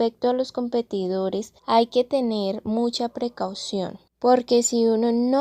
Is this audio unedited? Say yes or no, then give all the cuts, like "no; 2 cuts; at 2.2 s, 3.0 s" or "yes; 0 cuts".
no; 2 cuts; at 1.6 s, 4.1 s